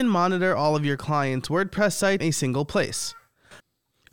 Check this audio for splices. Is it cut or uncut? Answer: cut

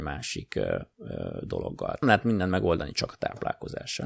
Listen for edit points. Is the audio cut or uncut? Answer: cut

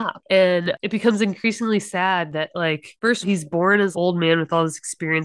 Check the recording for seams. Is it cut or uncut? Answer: cut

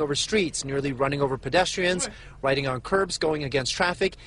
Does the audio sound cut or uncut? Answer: uncut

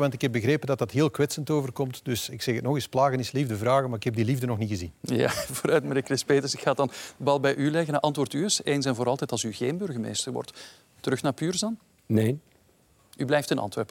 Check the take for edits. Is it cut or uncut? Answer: uncut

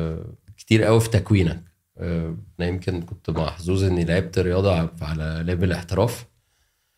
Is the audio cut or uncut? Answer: cut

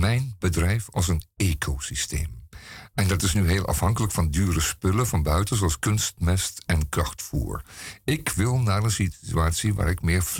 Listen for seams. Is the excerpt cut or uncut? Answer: uncut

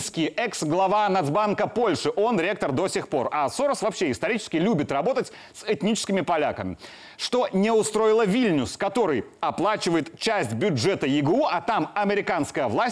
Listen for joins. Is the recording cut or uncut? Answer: uncut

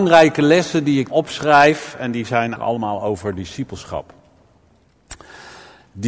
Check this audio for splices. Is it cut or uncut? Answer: cut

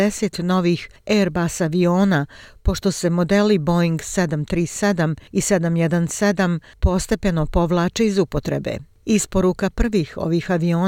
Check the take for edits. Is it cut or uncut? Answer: uncut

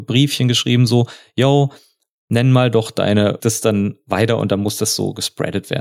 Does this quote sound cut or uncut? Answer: cut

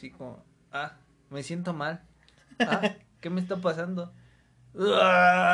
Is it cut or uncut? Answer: uncut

